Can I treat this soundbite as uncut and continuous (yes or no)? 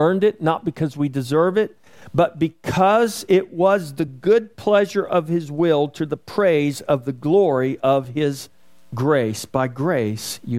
yes